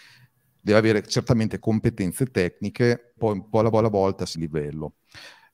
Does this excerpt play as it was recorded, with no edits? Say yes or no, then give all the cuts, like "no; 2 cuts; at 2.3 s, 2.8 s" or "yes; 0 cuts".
no; 4 cuts; at 1.6 s, 3.2 s, 3.7 s, 4.3 s